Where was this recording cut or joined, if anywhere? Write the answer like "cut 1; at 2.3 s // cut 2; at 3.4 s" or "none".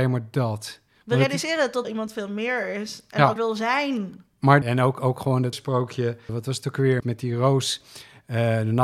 cut 1; at 1.8 s // cut 2; at 3.4 s // cut 3; at 4.6 s // cut 4; at 5.5 s // cut 5; at 6.3 s // cut 6; at 7.0 s